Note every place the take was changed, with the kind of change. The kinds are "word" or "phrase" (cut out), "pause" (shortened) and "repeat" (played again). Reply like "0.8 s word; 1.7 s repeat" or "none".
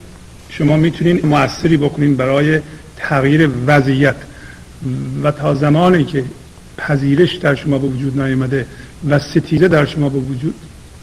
1.2 s word